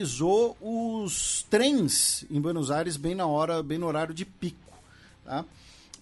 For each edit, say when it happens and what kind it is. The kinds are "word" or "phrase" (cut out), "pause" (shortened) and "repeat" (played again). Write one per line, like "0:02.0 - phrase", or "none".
none